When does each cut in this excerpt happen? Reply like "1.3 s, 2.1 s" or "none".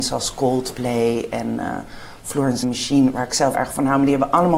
2.6 s, 3.5 s